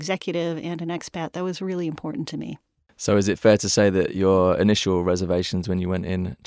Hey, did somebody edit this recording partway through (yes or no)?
no